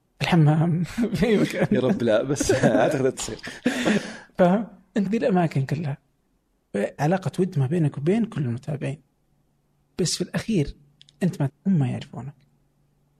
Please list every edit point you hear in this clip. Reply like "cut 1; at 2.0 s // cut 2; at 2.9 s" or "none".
cut 1; at 3.1 s // cut 2; at 5.0 s // cut 3; at 7.0 s // cut 4; at 11.5 s